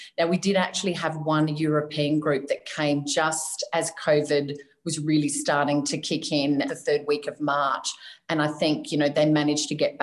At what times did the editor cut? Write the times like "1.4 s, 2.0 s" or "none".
6.7 s